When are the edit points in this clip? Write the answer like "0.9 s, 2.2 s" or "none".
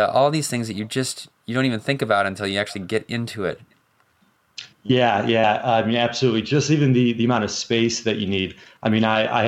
4.7 s